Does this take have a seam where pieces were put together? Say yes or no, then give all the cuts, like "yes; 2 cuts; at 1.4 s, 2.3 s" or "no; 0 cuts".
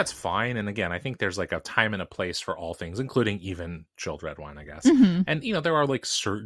no; 0 cuts